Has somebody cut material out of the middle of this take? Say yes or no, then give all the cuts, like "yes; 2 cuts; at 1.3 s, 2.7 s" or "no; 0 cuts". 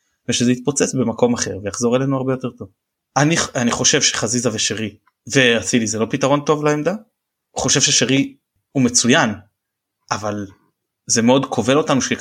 no; 0 cuts